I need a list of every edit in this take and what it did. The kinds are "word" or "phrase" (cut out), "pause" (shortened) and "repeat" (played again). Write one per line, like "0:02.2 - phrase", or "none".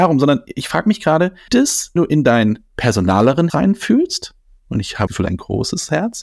0:01.5 - word
0:02.0 - word
0:03.5 - word
0:05.1 - word